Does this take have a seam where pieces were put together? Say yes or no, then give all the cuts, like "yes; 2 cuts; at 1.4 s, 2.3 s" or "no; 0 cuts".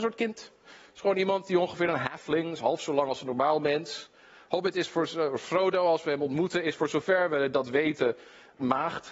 no; 0 cuts